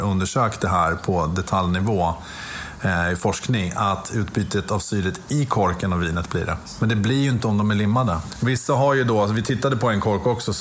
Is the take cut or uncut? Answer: uncut